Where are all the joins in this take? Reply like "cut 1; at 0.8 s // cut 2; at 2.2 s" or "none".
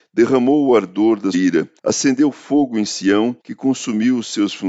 cut 1; at 1.3 s // cut 2; at 1.8 s // cut 3; at 3.4 s